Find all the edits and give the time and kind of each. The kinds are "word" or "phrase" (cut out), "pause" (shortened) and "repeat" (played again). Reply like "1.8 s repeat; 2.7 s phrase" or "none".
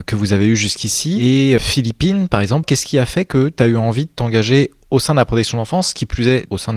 1.6 s word; 2.6 s phrase